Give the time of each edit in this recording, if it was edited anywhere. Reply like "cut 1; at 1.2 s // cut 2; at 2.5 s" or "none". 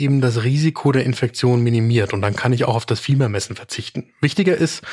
none